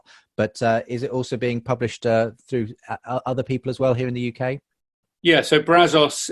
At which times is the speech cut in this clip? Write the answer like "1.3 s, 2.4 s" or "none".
none